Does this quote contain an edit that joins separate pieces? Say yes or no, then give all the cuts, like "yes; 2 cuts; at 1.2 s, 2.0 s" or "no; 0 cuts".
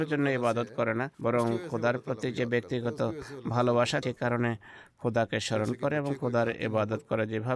yes; 2 cuts; at 1.1 s, 4.0 s